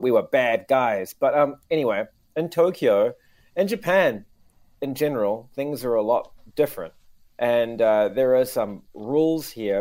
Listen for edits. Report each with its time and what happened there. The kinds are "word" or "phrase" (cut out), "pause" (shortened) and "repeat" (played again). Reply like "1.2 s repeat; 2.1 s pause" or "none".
none